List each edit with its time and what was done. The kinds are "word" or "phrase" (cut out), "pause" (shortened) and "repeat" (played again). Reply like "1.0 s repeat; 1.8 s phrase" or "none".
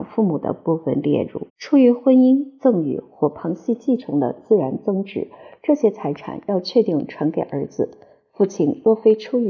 1.5 s pause